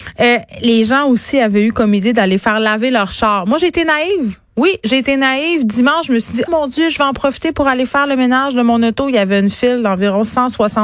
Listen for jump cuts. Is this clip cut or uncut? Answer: cut